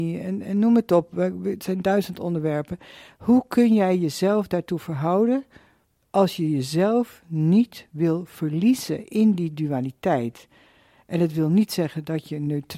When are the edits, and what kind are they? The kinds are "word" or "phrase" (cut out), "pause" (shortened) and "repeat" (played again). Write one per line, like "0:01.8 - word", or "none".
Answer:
none